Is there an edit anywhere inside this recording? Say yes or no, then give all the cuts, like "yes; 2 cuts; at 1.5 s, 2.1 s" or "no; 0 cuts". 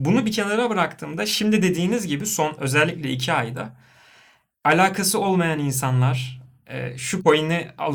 no; 0 cuts